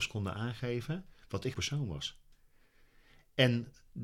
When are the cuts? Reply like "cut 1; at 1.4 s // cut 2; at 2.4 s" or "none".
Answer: cut 1; at 1.5 s